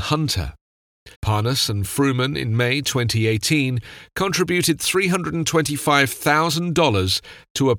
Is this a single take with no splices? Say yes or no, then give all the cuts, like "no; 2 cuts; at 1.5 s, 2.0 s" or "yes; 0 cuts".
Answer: no; 1 cut; at 1.1 s